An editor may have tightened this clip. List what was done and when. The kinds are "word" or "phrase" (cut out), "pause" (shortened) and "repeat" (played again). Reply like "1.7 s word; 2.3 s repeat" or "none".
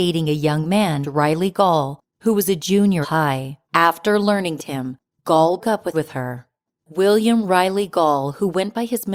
1.0 s word; 3.0 s phrase; 3.6 s pause; 4.6 s phrase; 5.6 s word; 5.9 s phrase